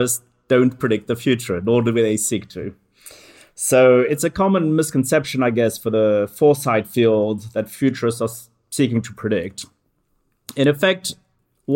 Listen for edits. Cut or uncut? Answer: uncut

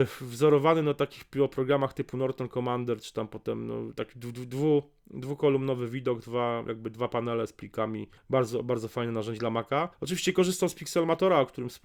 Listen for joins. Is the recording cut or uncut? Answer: cut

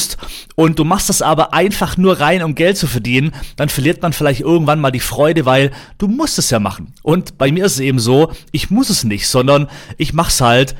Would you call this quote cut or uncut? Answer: uncut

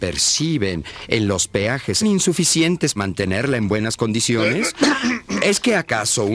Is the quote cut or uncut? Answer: cut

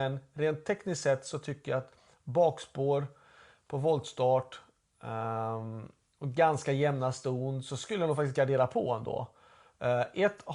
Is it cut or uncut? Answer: uncut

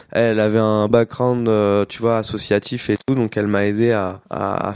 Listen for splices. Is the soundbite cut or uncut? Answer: cut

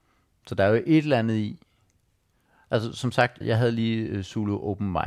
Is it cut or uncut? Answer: cut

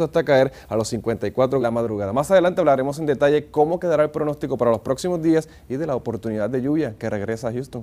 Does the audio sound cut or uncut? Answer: cut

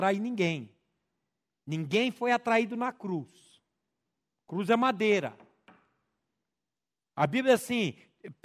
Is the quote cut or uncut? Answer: uncut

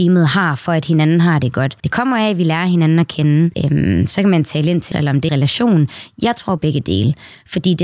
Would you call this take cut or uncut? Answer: cut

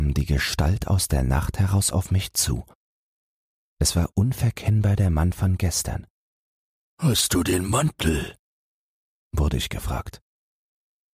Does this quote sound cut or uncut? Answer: uncut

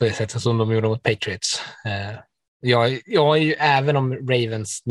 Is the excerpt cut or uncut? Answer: uncut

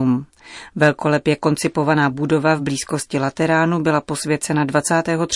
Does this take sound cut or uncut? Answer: uncut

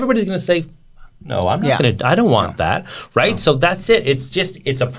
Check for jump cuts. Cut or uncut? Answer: uncut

